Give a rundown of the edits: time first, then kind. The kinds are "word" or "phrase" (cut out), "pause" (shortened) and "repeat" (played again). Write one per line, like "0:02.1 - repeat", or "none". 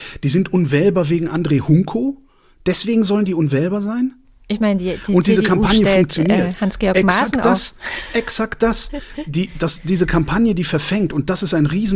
none